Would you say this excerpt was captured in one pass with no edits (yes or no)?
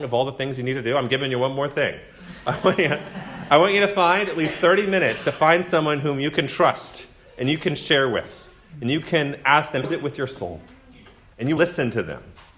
no